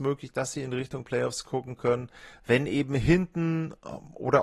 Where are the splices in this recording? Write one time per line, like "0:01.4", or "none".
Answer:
none